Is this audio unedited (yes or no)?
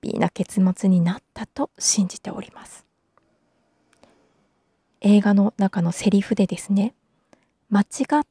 yes